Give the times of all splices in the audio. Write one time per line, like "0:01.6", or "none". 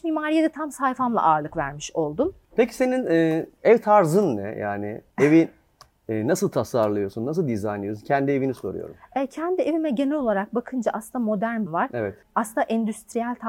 0:05.1
0:11.7